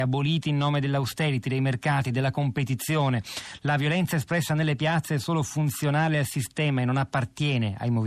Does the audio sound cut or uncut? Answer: uncut